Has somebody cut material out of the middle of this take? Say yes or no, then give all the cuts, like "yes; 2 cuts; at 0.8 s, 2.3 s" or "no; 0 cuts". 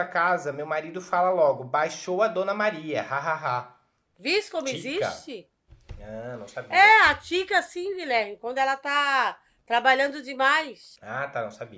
no; 0 cuts